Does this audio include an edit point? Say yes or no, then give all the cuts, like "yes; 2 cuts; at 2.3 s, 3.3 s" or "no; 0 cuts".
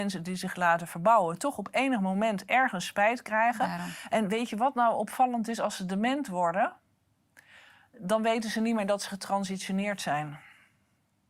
no; 0 cuts